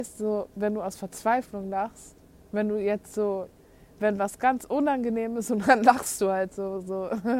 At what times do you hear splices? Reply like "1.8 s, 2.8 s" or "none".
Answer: none